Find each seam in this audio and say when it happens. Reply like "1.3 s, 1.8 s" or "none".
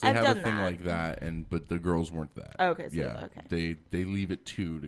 2.4 s